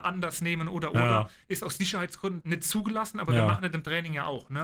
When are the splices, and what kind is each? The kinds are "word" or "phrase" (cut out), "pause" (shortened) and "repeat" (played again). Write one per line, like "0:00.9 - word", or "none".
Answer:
0:02.4 - word